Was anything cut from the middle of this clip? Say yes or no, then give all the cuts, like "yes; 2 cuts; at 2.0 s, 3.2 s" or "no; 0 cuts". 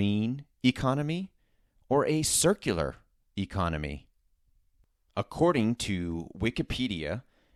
no; 0 cuts